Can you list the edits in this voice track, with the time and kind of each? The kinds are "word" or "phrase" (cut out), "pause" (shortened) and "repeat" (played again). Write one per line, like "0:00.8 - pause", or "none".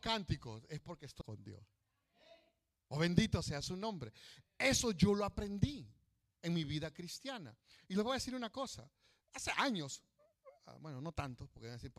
0:01.2 - word